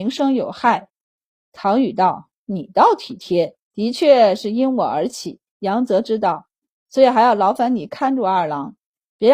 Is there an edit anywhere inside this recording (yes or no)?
yes